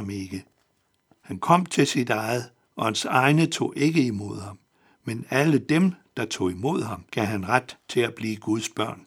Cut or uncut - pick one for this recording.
cut